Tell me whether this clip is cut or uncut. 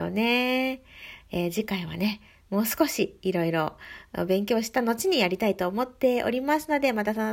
uncut